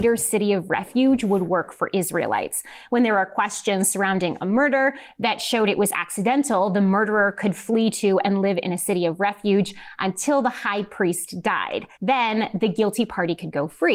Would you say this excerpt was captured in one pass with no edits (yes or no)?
no